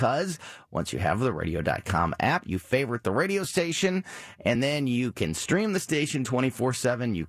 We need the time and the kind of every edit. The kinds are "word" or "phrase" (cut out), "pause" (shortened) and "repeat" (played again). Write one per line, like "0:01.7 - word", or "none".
none